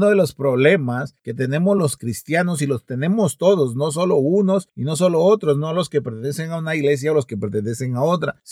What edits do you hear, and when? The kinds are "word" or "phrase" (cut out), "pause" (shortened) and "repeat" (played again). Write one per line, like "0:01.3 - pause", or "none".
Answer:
none